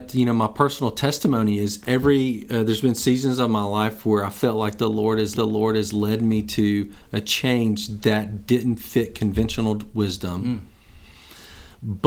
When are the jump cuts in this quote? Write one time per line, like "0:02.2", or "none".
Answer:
0:05.3